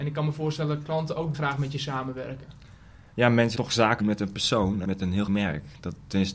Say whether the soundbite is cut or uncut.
cut